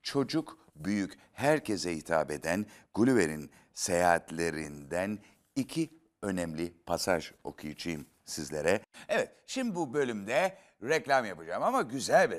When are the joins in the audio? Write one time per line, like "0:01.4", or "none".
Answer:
none